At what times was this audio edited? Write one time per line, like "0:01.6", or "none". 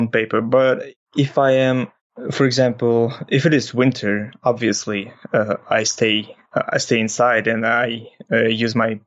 0:06.5